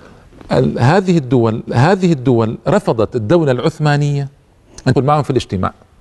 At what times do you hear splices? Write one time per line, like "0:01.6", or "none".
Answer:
0:01.7
0:04.9